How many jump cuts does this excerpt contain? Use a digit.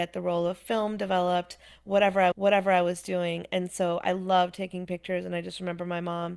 1